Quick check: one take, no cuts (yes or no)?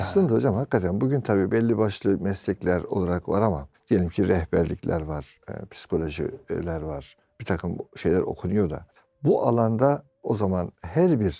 no